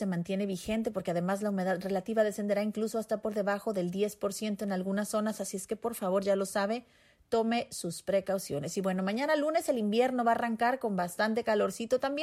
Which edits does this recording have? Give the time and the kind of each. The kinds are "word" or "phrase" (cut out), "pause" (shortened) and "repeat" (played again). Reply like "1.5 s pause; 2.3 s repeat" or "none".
none